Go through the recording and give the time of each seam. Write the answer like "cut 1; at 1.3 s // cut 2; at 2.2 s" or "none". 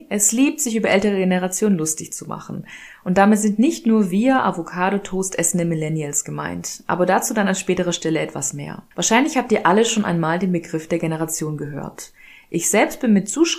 cut 1; at 8.9 s